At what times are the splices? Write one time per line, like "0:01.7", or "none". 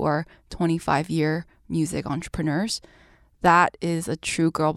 none